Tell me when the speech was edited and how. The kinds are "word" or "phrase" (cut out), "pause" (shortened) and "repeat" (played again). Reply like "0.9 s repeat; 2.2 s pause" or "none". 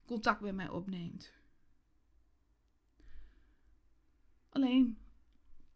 none